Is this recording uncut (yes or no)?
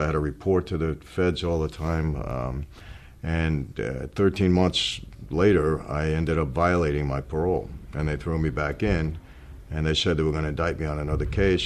yes